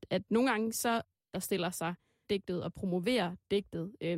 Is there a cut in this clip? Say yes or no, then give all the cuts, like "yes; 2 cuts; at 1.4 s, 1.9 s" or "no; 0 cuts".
yes; 2 cuts; at 1.3 s, 2.2 s